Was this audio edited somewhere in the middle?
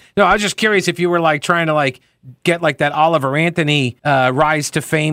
yes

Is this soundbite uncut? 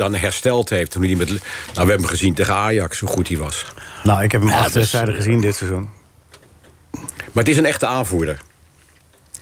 yes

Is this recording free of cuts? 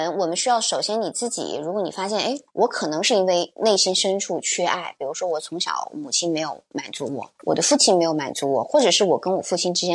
no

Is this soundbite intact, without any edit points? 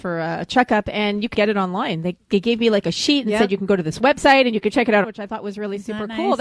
no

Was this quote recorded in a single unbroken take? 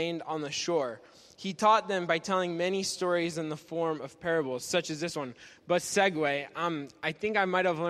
yes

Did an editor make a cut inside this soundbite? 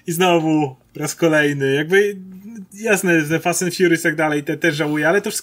no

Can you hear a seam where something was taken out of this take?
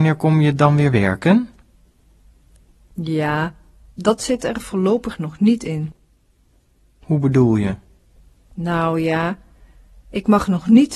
no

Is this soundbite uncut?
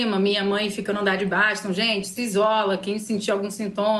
yes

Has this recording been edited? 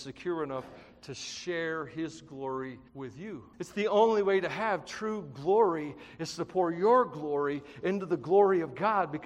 yes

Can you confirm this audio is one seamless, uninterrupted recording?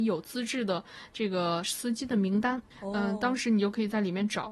no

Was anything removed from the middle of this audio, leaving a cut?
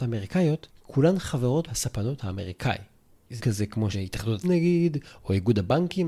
yes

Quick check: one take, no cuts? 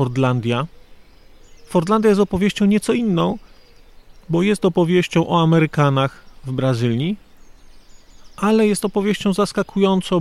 yes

